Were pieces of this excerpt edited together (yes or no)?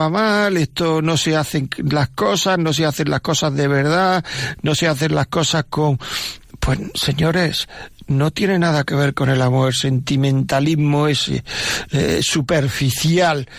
yes